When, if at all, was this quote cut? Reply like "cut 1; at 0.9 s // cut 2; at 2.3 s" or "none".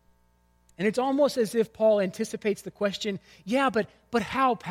none

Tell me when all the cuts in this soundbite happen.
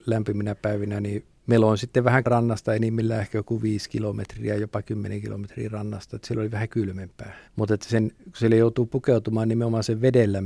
cut 1; at 1.4 s // cut 2; at 2.2 s // cut 3; at 7.5 s

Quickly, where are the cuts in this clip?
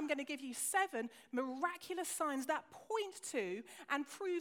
none

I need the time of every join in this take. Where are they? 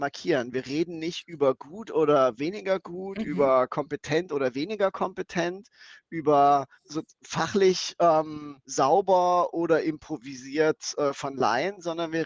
cut 1; at 6.7 s // cut 2; at 8.6 s

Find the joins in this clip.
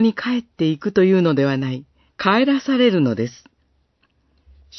cut 1; at 2.1 s

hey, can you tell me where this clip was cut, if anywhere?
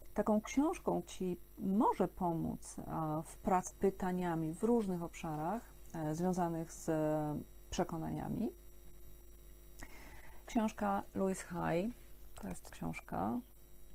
cut 1; at 1.0 s // cut 2; at 3.7 s // cut 3; at 10.5 s // cut 4; at 12.7 s

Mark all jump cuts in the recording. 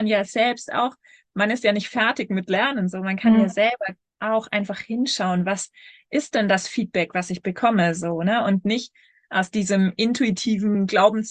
none

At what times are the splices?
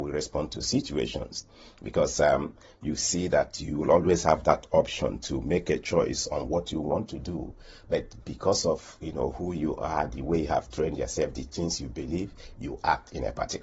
none

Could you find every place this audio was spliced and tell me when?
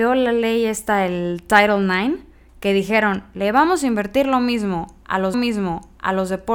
cut 1; at 5.3 s

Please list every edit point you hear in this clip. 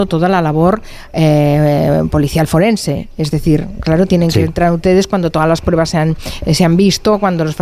none

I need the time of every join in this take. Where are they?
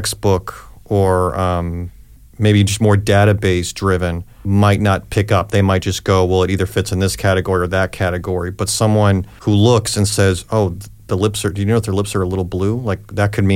none

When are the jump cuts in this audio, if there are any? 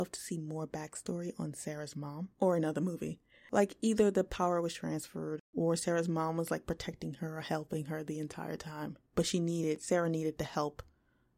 cut 1; at 2.3 s // cut 2; at 5.4 s // cut 3; at 9.1 s

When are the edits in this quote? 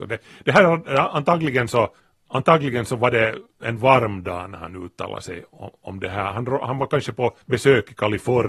cut 1; at 2.0 s // cut 2; at 7.4 s

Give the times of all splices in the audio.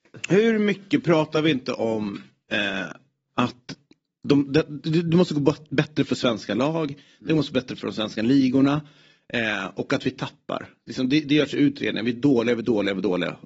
none

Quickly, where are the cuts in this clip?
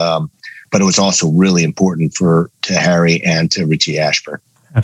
none

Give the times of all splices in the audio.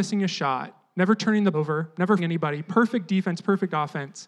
cut 1; at 1.5 s // cut 2; at 2.2 s

